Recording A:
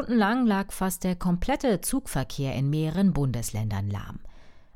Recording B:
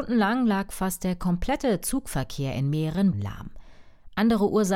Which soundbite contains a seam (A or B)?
B